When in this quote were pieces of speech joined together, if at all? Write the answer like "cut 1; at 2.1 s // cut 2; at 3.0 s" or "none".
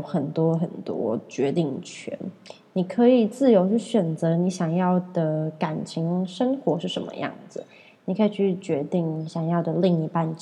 none